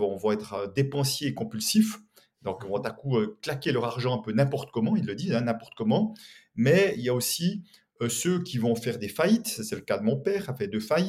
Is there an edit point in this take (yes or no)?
no